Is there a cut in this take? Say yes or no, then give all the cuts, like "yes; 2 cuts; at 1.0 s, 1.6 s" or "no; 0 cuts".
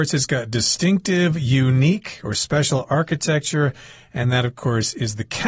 no; 0 cuts